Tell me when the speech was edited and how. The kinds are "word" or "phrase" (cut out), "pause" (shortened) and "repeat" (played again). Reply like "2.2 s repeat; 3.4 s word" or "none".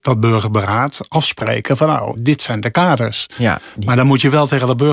2.2 s word